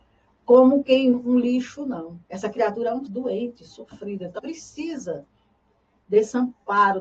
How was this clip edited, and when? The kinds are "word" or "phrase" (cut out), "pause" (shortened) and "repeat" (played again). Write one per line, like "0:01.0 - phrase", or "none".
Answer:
0:01.1 - word
0:02.2 - pause
0:03.1 - word
0:04.4 - word